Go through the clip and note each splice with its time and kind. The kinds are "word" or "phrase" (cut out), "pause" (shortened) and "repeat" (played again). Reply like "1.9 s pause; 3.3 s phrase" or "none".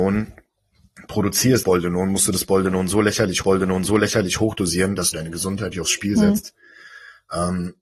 1.6 s word; 3.4 s repeat; 5.1 s word; 5.7 s word